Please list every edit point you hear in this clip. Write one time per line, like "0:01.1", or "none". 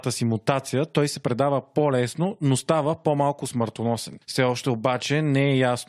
none